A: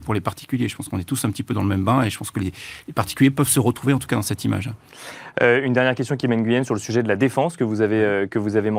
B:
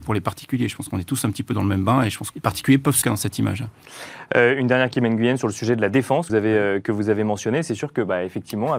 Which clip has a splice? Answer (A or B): B